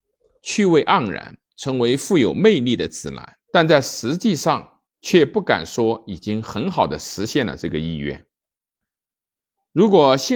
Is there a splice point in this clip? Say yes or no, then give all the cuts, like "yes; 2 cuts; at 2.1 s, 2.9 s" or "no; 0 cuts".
yes; 2 cuts; at 3.4 s, 4.9 s